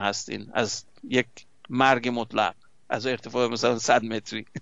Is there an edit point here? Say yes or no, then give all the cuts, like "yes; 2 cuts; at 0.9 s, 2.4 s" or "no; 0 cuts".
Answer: no; 0 cuts